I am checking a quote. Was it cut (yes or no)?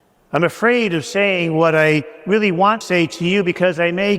yes